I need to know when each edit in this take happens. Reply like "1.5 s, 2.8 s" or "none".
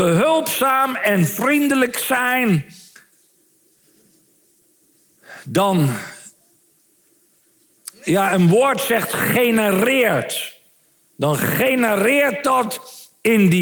none